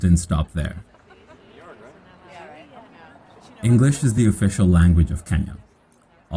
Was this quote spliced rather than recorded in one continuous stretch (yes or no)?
no